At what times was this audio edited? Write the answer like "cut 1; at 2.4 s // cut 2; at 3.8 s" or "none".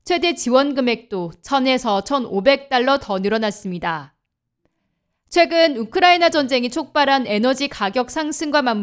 none